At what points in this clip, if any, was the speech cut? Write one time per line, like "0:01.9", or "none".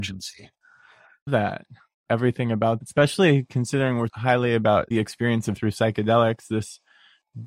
0:01.3
0:02.1
0:02.8
0:04.1
0:04.9
0:05.6